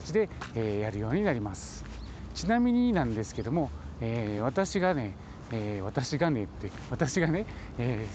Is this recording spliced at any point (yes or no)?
no